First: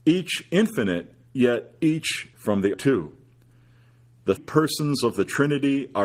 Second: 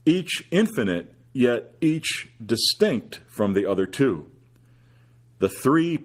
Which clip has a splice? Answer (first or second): first